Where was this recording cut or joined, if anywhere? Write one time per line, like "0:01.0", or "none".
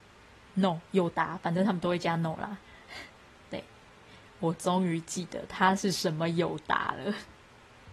none